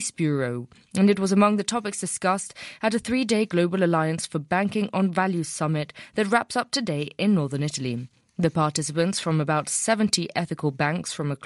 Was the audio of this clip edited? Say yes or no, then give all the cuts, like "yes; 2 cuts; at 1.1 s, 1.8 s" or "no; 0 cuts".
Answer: no; 0 cuts